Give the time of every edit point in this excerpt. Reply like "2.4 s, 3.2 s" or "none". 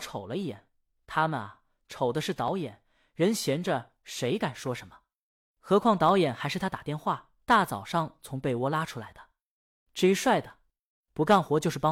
7.4 s